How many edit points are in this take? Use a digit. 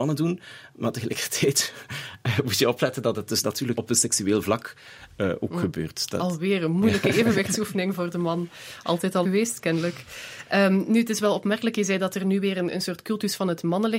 2